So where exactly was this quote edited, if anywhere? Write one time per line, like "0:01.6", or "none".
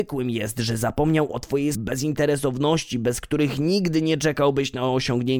0:01.7